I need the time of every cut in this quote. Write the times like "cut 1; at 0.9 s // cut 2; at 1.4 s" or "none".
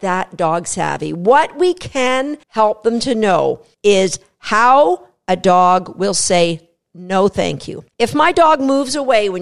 cut 1; at 2.4 s // cut 2; at 7.9 s